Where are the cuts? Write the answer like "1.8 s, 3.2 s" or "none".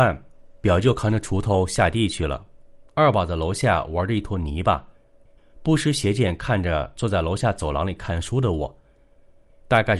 none